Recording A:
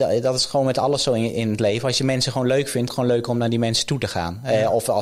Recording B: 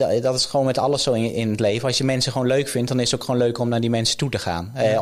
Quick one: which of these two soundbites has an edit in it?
A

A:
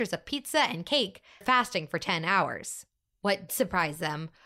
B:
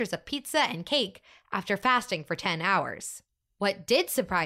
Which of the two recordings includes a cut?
A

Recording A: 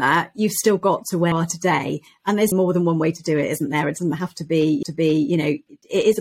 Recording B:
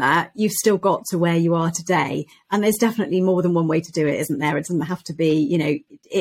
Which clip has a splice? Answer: A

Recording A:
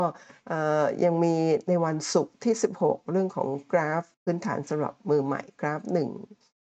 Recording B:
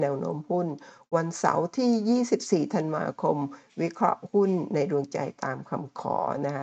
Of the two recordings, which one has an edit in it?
A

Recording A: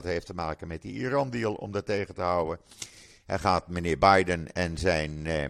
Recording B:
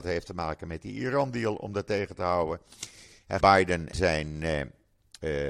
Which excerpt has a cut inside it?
B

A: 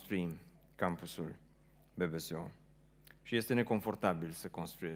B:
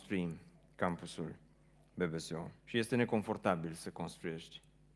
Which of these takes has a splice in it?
B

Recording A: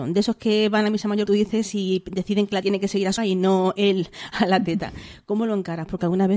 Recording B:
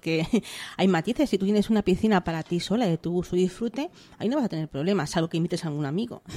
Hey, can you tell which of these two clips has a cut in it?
A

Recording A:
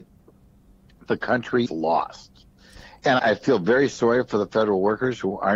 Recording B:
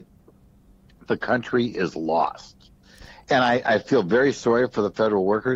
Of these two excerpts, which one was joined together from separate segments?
A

